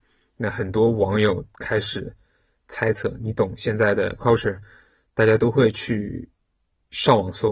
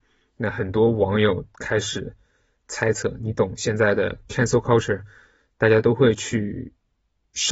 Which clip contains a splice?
first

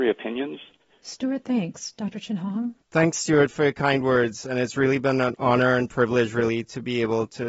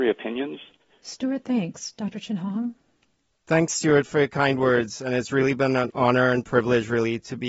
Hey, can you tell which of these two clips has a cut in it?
first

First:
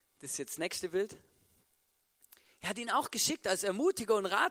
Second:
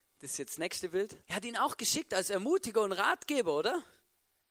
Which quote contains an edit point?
second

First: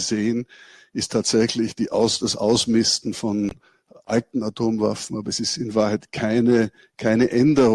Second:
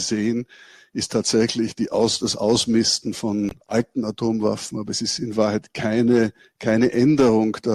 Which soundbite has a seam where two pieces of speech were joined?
second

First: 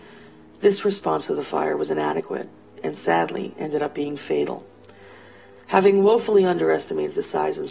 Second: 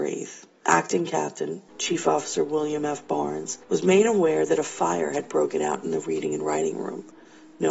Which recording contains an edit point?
second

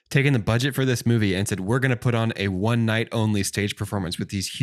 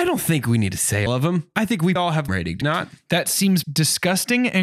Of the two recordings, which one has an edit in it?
second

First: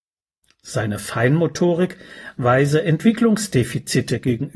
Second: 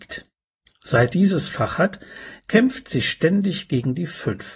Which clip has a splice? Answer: second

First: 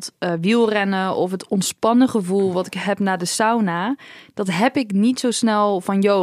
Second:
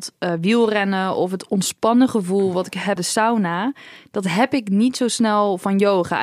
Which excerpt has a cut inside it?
second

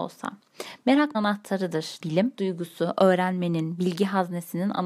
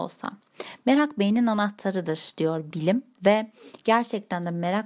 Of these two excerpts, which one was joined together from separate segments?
first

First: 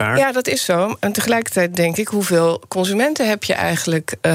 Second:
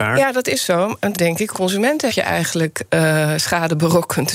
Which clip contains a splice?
second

